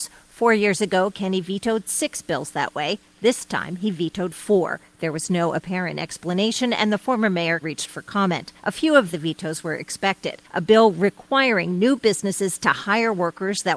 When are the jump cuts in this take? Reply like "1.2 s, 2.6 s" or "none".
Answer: 7.6 s, 8.6 s